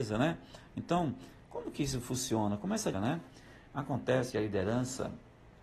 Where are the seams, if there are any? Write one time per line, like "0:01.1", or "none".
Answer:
0:02.9
0:04.3